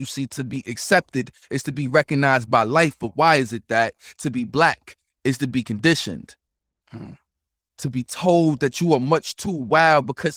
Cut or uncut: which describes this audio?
uncut